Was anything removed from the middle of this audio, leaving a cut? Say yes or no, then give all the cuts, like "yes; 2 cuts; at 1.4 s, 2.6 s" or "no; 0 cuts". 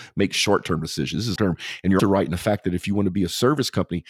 yes; 2 cuts; at 1.4 s, 2.0 s